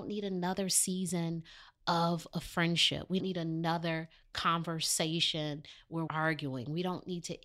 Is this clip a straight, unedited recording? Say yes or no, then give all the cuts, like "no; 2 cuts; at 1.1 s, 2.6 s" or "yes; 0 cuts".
no; 2 cuts; at 3.2 s, 6.1 s